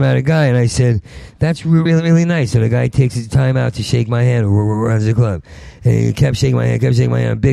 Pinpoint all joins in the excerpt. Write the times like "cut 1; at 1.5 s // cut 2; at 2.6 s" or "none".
cut 1; at 1.9 s

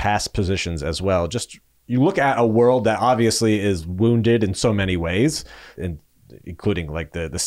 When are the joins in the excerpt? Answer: cut 1; at 5.8 s

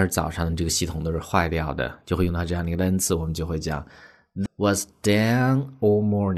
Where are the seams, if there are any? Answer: cut 1; at 4.5 s

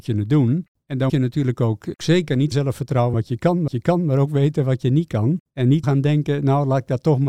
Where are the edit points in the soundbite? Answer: cut 1; at 1.1 s // cut 2; at 2.5 s // cut 3; at 3.1 s // cut 4; at 3.7 s // cut 5; at 5.8 s

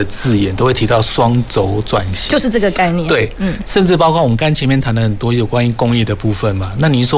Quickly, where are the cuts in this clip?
none

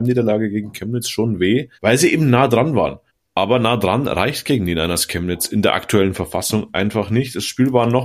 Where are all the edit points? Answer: cut 1; at 1.7 s // cut 2; at 3.1 s

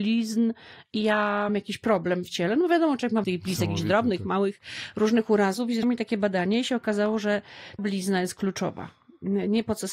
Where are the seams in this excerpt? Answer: cut 1; at 1.5 s // cut 2; at 3.2 s // cut 3; at 5.8 s // cut 4; at 7.8 s

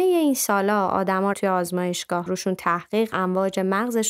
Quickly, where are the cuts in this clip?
cut 1; at 1.3 s // cut 2; at 2.3 s // cut 3; at 3.1 s

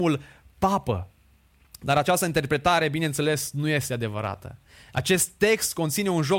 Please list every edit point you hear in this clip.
none

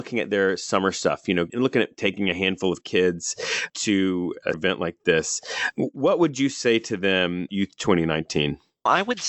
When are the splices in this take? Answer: cut 1; at 1.5 s // cut 2; at 4.5 s // cut 3; at 7.5 s

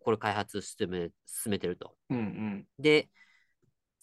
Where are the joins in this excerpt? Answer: cut 1; at 2.0 s // cut 2; at 2.7 s

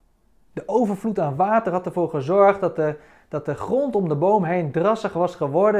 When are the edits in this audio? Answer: none

